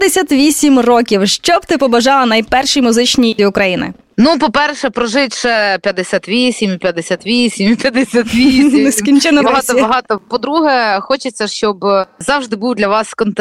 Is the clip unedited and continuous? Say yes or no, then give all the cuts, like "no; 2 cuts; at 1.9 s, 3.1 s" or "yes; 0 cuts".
no; 2 cuts; at 3.4 s, 9.4 s